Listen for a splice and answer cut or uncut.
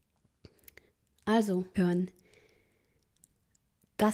cut